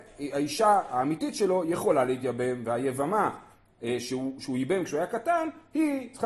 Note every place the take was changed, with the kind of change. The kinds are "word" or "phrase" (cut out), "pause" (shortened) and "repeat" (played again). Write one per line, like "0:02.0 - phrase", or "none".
none